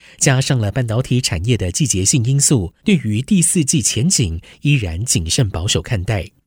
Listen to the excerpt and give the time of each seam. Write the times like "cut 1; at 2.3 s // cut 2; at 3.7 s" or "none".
cut 1; at 2.8 s

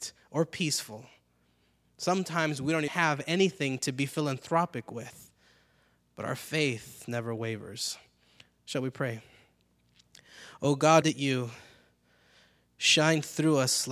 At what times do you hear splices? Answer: cut 1; at 2.9 s // cut 2; at 11.0 s

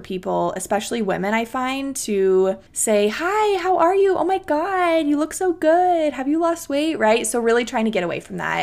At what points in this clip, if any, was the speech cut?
cut 1; at 2.7 s

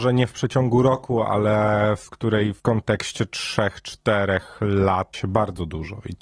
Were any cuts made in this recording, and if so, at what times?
cut 1; at 2.6 s // cut 2; at 5.1 s

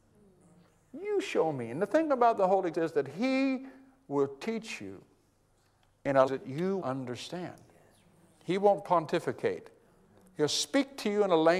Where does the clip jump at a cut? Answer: cut 1; at 2.7 s // cut 2; at 6.3 s // cut 3; at 6.8 s

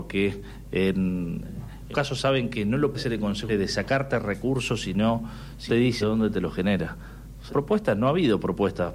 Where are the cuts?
cut 1; at 1.9 s // cut 2; at 2.9 s // cut 3; at 3.5 s // cut 4; at 5.7 s // cut 5; at 6.0 s // cut 6; at 7.5 s

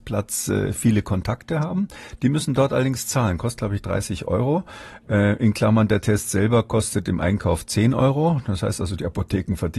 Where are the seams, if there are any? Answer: none

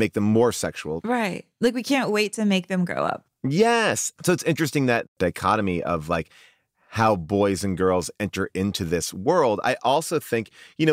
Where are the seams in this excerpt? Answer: none

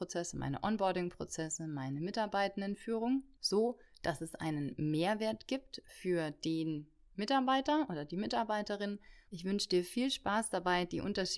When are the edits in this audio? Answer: cut 1; at 9.3 s

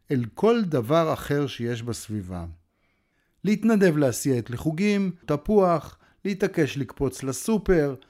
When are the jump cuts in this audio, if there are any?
cut 1; at 4.4 s // cut 2; at 5.2 s

